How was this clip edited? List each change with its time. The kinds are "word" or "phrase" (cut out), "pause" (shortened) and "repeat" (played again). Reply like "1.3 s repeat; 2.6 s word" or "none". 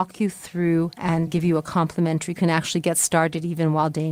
1.3 s word; 2.4 s phrase